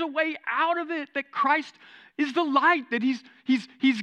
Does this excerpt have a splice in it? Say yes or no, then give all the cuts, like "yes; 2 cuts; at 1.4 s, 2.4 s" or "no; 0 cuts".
no; 0 cuts